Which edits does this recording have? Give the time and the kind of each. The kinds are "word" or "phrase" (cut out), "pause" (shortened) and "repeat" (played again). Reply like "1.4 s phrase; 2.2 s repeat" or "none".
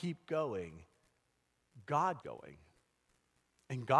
2.2 s word